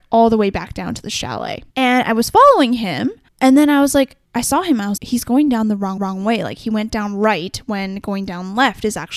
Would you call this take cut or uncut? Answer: cut